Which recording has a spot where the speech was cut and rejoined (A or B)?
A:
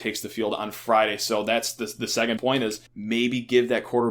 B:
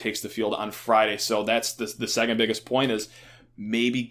A